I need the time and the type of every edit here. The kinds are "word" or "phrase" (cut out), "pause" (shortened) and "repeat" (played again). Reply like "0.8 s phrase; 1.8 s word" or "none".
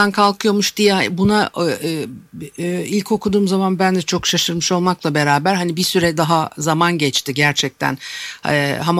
none